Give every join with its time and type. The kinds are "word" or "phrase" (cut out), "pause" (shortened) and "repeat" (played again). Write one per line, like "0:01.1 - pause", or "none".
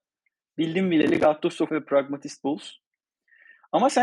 0:01.7 - word